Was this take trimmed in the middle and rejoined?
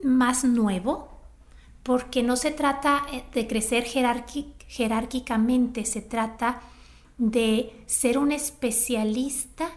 no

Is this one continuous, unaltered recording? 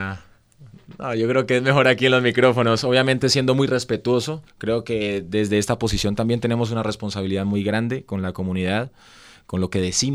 no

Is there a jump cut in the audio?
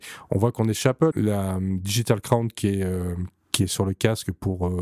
yes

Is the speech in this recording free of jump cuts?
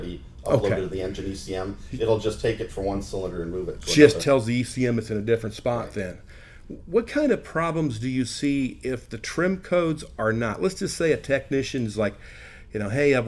yes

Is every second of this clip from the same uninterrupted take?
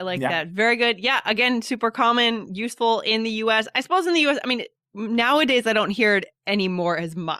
yes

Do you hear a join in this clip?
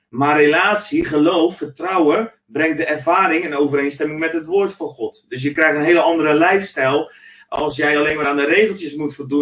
no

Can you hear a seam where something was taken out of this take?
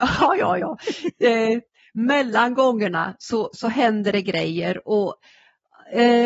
no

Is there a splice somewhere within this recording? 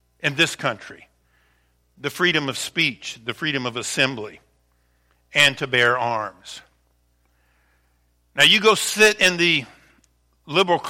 no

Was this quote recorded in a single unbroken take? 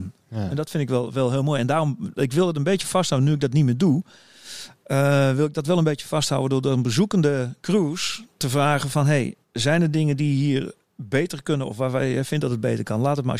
no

